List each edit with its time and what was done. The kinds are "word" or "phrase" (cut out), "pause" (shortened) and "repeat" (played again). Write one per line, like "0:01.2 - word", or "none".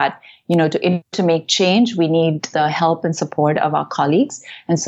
0:01.1 - word
0:02.5 - word

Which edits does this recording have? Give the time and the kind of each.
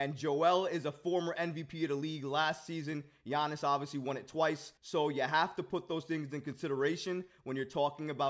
0:04.8 - pause

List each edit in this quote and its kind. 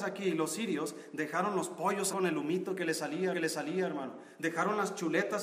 0:02.1 - word
0:03.3 - repeat

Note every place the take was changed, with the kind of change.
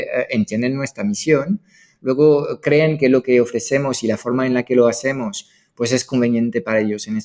none

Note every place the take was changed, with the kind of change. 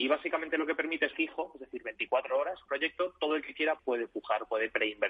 0:01.1 - phrase
0:02.7 - phrase
0:03.8 - word

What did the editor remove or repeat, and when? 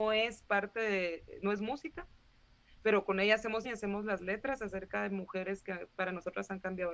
0:03.6 - word

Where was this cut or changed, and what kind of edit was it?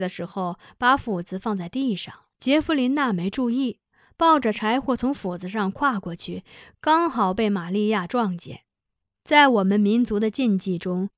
0:02.3 - pause
0:08.8 - pause

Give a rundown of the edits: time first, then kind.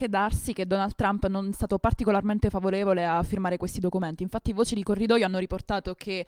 0:01.5 - word

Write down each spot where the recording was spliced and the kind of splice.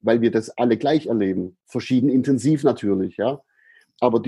0:01.6 - pause

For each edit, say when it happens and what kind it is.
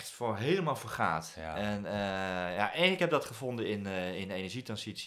0:03.0 - word

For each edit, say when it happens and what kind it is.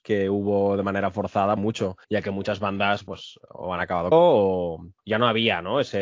0:01.6 - phrase
0:02.0 - pause
0:03.1 - word
0:04.1 - word
0:05.0 - pause

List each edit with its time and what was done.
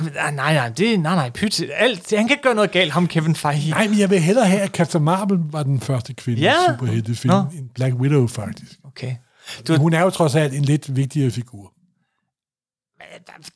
none

